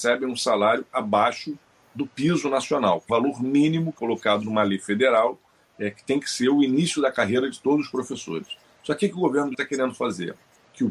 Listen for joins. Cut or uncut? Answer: cut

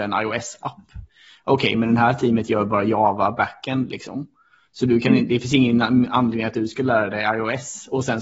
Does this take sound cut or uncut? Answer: uncut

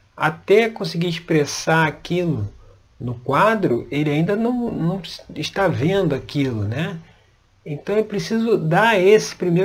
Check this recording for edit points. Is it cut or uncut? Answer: uncut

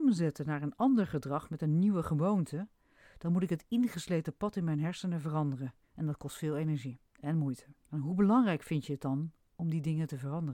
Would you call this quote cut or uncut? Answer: cut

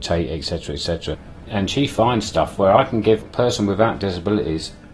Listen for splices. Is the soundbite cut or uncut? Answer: uncut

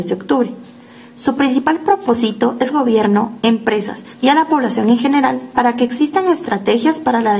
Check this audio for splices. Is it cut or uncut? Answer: cut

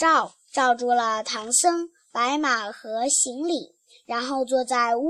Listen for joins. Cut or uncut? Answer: uncut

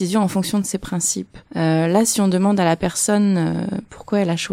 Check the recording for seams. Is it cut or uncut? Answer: cut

